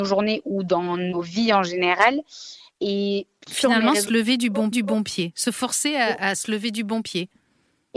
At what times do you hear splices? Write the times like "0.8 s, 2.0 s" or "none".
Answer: 4.7 s